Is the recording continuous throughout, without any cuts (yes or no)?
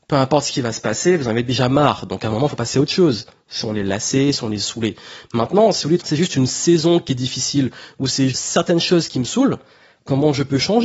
no